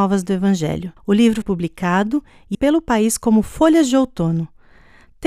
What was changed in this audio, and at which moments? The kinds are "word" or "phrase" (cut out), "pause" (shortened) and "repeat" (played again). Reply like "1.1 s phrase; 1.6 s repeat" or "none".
1.0 s pause; 1.4 s word; 2.5 s word

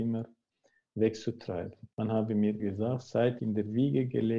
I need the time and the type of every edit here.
1.9 s pause; 2.6 s word; 3.4 s word

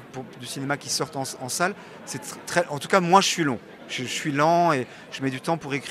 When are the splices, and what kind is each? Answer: none

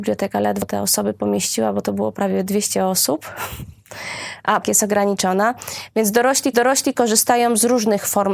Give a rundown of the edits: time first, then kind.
4.6 s phrase; 6.5 s repeat

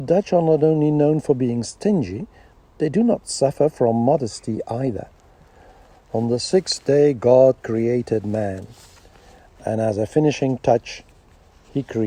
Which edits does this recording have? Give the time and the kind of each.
none

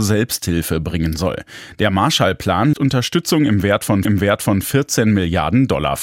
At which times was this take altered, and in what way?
2.7 s word; 4.0 s repeat

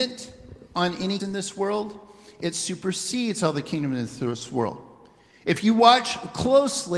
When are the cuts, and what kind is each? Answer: 1.2 s word

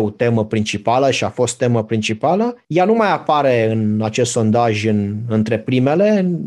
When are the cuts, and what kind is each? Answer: 2.6 s pause

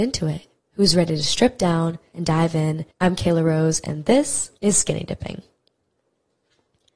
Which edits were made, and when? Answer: 2.9 s pause; 4.6 s pause

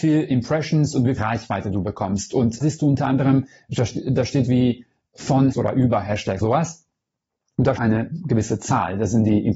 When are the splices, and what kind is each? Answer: 1.2 s word; 2.6 s word; 4.5 s word; 5.5 s word; 6.4 s word; 7.8 s word

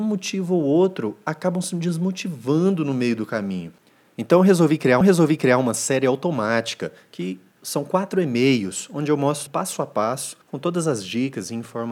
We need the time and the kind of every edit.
5.0 s repeat; 9.5 s word; 10.4 s pause

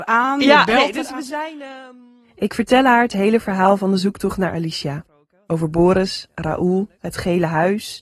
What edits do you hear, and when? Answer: none

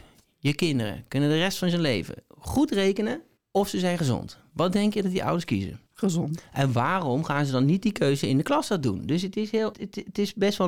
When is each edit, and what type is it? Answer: 3.4 s pause; 5.9 s pause; 9.7 s word

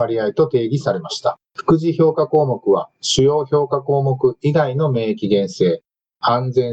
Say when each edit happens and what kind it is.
1.4 s pause

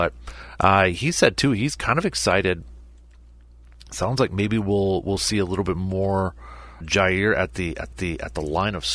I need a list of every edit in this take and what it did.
6.8 s word; 7.9 s repeat

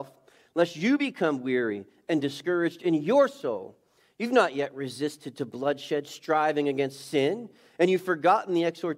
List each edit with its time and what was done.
none

